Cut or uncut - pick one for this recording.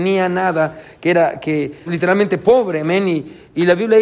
cut